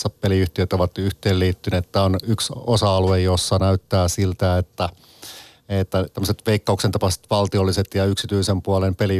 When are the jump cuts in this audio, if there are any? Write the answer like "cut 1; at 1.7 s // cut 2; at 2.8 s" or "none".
cut 1; at 6.1 s